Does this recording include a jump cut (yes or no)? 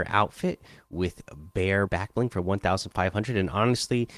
yes